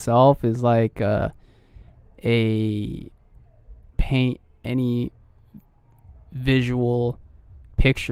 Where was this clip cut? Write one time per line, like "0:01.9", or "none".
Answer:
0:03.9